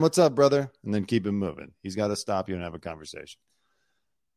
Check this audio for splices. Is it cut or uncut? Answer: uncut